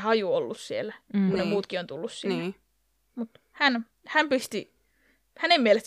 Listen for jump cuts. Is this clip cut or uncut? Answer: uncut